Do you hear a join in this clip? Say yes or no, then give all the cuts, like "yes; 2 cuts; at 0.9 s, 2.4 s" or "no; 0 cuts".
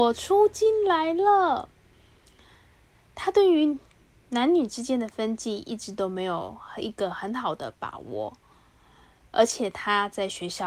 no; 0 cuts